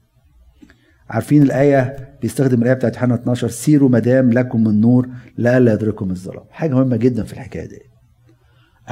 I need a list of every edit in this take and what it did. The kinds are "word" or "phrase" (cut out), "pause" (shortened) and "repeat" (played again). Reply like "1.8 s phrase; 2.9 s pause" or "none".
none